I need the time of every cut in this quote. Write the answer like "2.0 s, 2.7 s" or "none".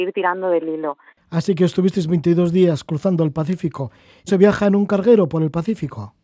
1.1 s, 4.3 s